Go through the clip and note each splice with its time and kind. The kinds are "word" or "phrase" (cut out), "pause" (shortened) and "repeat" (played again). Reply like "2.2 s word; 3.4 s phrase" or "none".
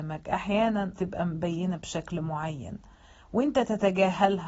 1.0 s word